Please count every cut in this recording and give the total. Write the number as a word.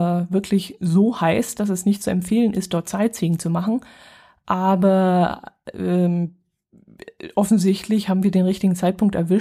zero